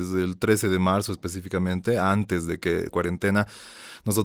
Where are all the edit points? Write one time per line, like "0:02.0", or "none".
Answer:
0:02.9